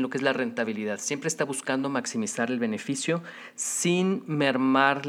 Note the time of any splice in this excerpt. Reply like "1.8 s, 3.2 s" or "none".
none

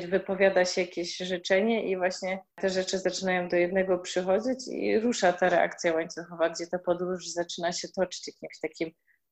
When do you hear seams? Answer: 2.5 s

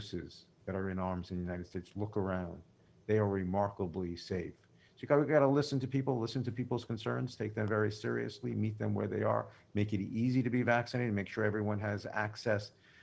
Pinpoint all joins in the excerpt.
none

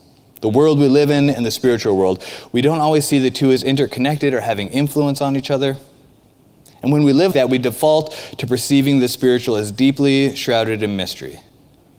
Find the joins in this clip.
7.3 s

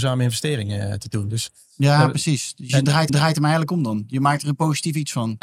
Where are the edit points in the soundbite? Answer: 3.1 s

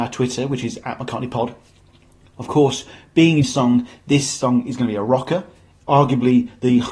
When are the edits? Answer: 3.4 s

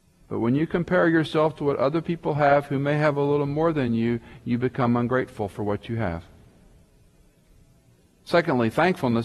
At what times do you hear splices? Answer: none

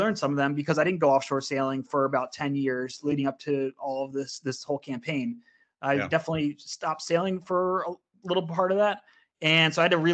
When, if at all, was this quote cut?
none

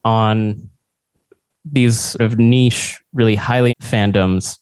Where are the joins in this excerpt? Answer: 2.2 s, 3.7 s

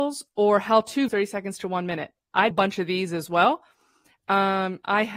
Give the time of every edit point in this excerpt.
1.1 s, 2.5 s

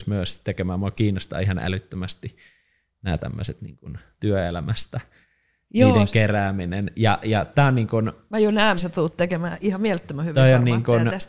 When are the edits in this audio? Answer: 4.2 s, 8.8 s

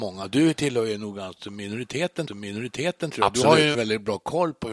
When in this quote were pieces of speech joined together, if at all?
2.3 s, 3.7 s

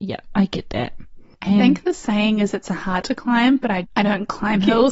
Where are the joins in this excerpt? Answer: 3.0 s, 3.8 s

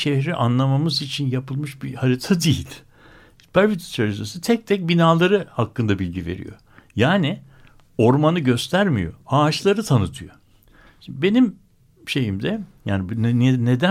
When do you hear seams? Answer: none

